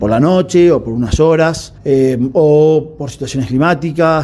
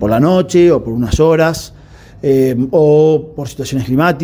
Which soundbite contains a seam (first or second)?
first